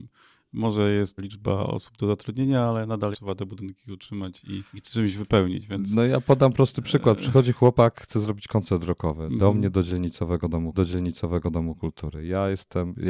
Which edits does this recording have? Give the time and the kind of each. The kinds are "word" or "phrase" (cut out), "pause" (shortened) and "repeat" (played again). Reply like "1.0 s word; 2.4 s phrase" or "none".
1.2 s phrase; 3.1 s word; 4.7 s pause; 10.7 s repeat